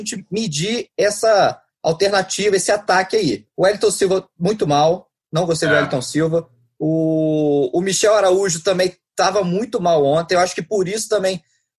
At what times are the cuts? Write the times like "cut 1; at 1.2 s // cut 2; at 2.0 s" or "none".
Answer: none